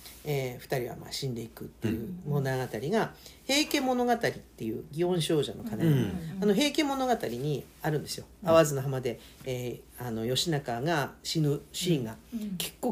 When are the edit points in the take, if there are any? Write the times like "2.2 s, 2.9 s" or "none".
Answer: none